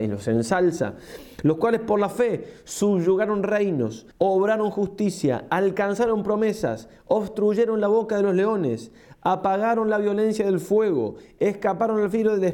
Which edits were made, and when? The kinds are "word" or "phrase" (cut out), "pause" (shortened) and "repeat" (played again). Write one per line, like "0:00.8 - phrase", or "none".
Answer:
0:04.1 - pause